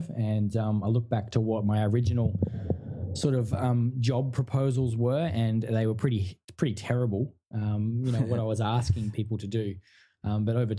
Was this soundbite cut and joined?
no; 0 cuts

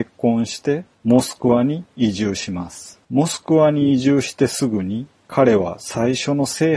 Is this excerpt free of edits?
no; 2 cuts; at 0.9 s, 3.0 s

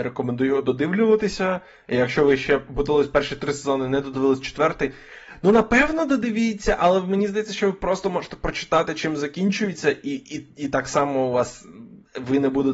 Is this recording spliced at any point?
no; 0 cuts

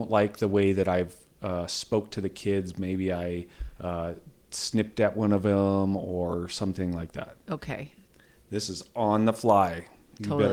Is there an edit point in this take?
yes; 1 cut; at 7.4 s

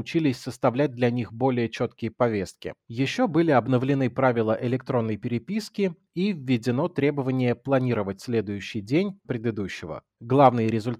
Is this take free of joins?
no; 1 cut; at 9.2 s

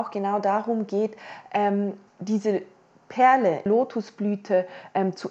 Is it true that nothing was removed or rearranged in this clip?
no; 2 cuts; at 2.1 s, 3.7 s

